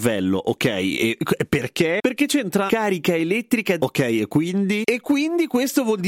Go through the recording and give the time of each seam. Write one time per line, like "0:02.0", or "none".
0:02.7
0:03.8